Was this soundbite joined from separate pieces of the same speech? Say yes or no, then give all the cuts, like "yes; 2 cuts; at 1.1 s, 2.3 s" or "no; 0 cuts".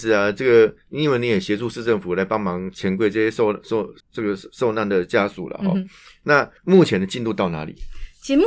yes; 2 cuts; at 4.0 s, 6.6 s